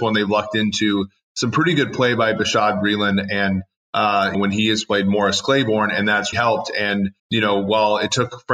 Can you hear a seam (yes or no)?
yes